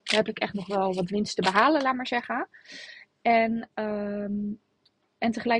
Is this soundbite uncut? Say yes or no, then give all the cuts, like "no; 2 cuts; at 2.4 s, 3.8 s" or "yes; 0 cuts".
yes; 0 cuts